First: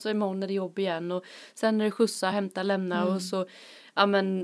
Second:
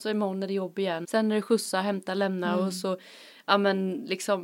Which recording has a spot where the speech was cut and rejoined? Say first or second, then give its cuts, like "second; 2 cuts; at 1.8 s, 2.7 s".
second; 1 cut; at 1.0 s